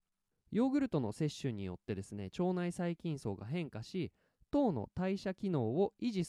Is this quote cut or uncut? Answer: uncut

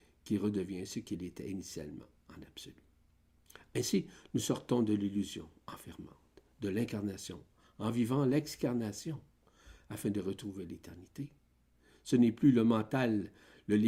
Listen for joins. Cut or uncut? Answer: uncut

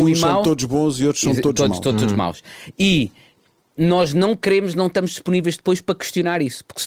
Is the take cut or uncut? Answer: uncut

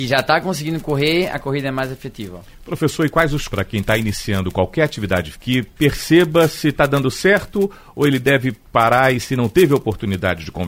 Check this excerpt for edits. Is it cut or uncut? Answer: cut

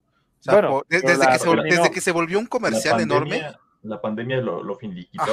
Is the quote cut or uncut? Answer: uncut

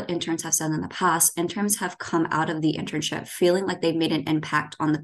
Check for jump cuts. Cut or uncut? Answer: uncut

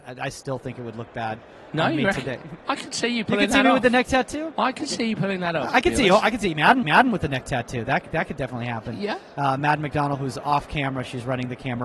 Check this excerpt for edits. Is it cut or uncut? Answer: cut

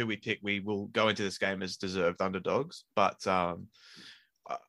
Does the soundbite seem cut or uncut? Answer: uncut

